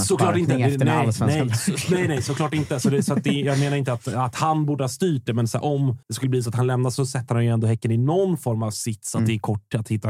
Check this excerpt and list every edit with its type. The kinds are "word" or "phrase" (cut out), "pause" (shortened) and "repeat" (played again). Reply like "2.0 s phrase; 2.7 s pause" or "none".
6.0 s pause